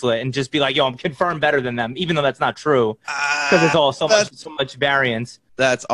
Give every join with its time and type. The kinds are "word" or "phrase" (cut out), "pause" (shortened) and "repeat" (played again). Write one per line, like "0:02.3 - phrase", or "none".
0:04.3 - word